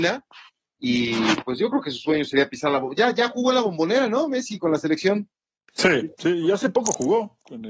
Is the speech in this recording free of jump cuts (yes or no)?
yes